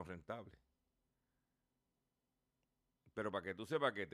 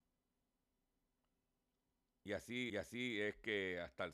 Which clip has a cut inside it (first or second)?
second